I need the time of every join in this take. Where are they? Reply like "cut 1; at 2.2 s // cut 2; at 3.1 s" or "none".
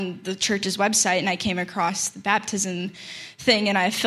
none